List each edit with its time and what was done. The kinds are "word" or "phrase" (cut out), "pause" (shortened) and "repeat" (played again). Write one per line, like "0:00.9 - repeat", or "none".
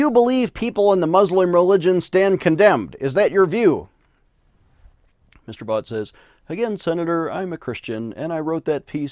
none